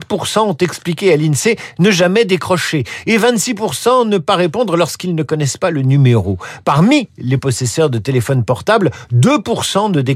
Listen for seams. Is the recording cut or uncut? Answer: uncut